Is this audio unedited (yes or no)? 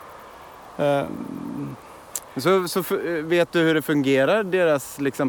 yes